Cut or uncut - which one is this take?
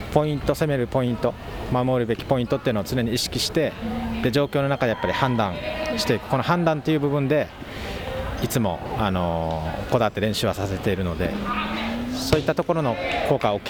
uncut